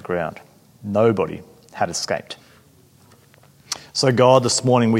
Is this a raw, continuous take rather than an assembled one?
yes; 0 cuts

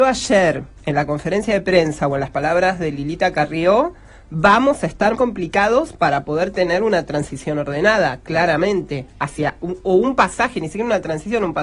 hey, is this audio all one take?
no; 1 cut; at 5.1 s

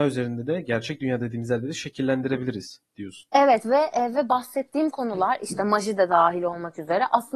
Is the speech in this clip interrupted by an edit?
no; 0 cuts

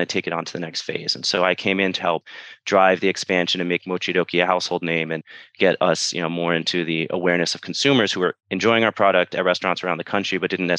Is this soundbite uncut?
no; 2 cuts; at 2.0 s, 8.4 s

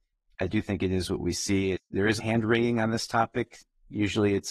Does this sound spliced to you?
yes; 1 cut; at 2.2 s

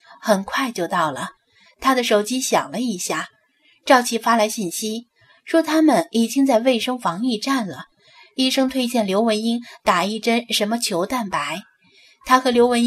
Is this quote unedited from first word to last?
yes; 0 cuts

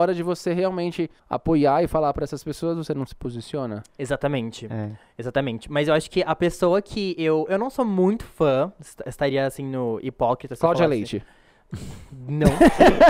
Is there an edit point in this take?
yes; 1 cut; at 1.2 s

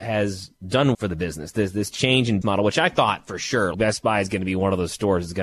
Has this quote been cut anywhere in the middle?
yes; 3 cuts; at 0.9 s, 2.4 s, 3.7 s

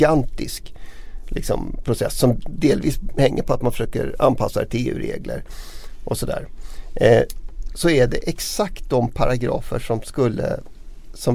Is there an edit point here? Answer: no; 0 cuts

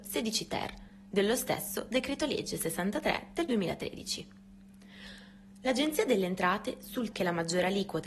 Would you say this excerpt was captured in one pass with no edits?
no; 1 cut; at 7.1 s

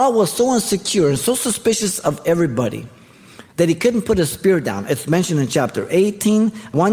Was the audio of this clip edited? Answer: yes; 1 cut; at 3.5 s

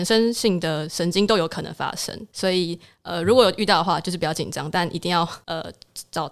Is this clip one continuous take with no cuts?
yes; 0 cuts

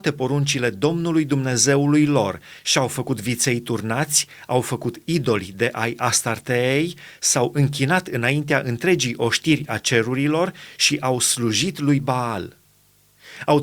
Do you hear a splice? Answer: no; 0 cuts

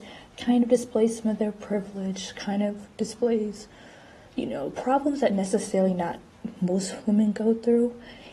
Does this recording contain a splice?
no; 0 cuts

